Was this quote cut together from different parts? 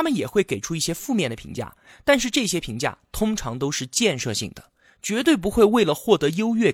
no; 0 cuts

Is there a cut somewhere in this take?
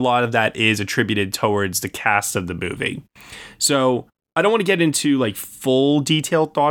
no; 0 cuts

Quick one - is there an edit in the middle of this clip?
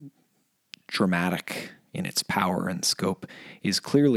no; 0 cuts

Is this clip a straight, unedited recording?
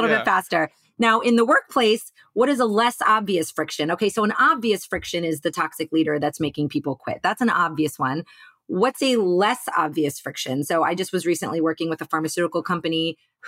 yes; 0 cuts

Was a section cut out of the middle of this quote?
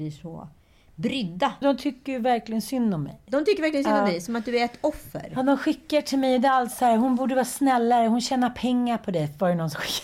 yes; 1 cut; at 1.6 s

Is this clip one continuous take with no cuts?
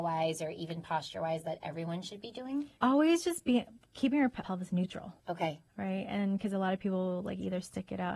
no; 3 cuts; at 2.8 s, 4.4 s, 5.2 s

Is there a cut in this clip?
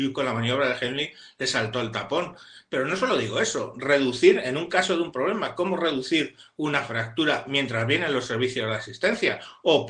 no; 0 cuts

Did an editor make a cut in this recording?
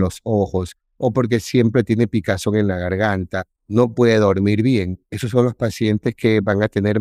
yes; 1 cut; at 3.6 s

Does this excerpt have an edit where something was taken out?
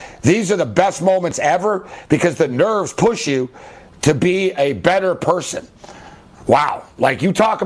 no; 0 cuts

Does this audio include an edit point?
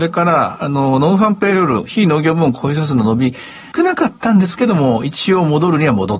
yes; 1 cut; at 3.7 s

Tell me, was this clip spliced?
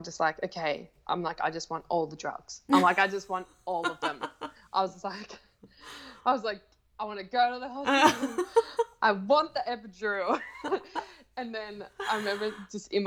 yes; 2 cuts; at 1.0 s, 6.2 s

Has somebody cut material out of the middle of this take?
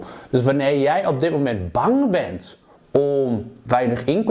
yes; 1 cut; at 2.8 s

